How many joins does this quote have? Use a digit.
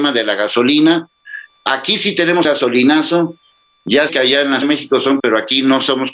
4